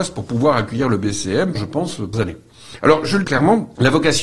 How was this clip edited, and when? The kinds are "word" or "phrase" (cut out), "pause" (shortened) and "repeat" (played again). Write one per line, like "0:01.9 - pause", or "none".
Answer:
0:01.5 - word
0:02.1 - word
0:03.2 - word